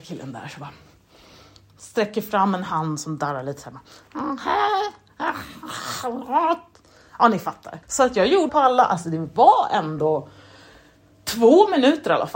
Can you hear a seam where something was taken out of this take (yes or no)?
yes